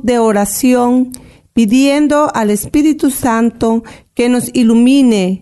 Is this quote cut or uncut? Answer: uncut